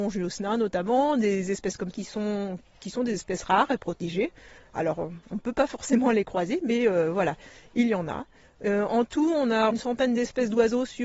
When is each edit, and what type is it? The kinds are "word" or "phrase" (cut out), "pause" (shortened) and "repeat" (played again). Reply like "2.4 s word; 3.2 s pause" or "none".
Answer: 1.9 s word; 9.7 s word

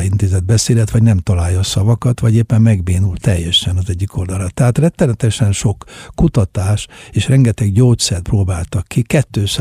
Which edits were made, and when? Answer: none

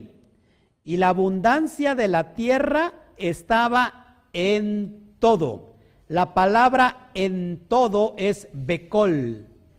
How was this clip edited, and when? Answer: none

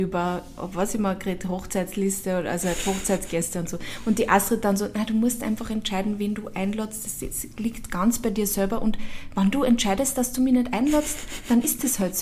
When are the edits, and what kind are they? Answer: none

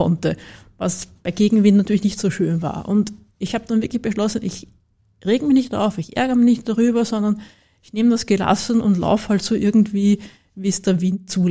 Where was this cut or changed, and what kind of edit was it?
none

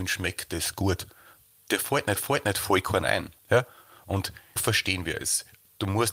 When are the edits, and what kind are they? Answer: 2.2 s repeat; 3.4 s pause; 4.6 s word

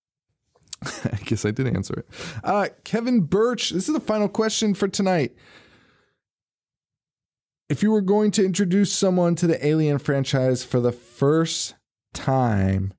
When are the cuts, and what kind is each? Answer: none

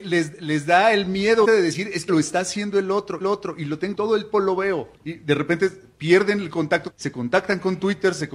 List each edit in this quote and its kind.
1.4 s word; 2.1 s word; 3.2 s repeat; 3.9 s word; 4.3 s word; 4.9 s pause; 6.9 s phrase

